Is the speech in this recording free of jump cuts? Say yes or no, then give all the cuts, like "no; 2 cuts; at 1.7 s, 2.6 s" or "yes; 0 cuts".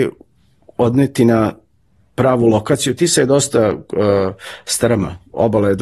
yes; 0 cuts